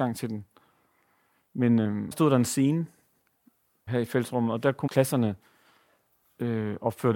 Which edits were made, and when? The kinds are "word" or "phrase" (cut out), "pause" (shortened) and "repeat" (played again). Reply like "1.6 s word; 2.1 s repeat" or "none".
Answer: 2.1 s word; 3.9 s word; 4.9 s word